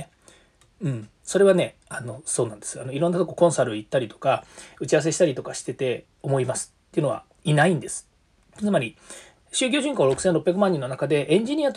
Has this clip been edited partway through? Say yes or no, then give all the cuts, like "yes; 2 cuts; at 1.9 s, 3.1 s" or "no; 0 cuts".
yes; 1 cut; at 7.3 s